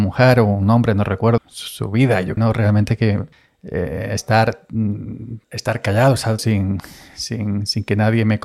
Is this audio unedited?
no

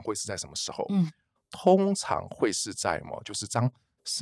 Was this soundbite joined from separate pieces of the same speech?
no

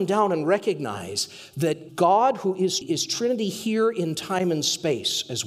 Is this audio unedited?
no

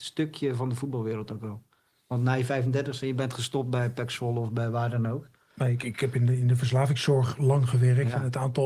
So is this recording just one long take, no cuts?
yes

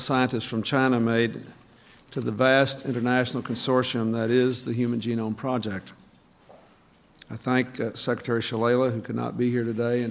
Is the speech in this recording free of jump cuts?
yes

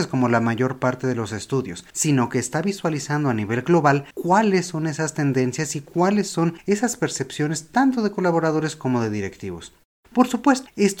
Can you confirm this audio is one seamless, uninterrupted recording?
yes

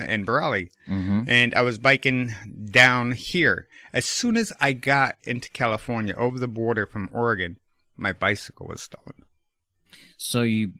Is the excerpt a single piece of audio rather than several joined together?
yes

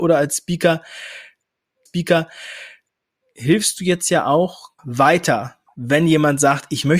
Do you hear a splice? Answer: yes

